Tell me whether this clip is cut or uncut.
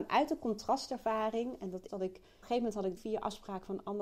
cut